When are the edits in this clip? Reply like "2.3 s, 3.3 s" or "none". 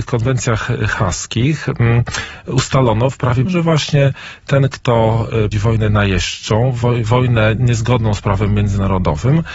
3.4 s, 5.5 s

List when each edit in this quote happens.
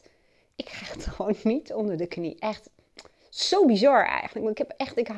none

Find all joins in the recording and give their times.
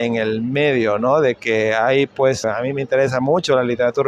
2.4 s

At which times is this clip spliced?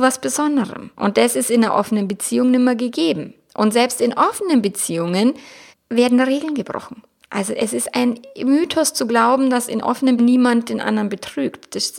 0.9 s, 5.7 s, 10.2 s

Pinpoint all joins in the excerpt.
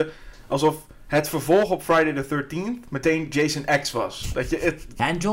none

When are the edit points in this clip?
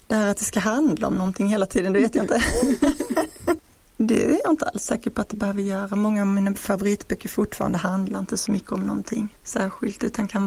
9.4 s

